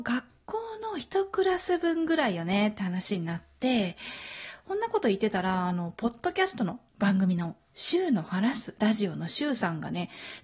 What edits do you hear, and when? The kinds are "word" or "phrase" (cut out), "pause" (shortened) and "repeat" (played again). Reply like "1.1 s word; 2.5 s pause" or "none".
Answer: 6.9 s pause